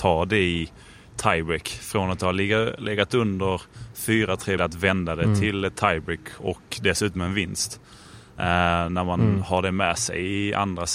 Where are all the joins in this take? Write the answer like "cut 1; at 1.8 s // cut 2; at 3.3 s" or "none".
cut 1; at 4.6 s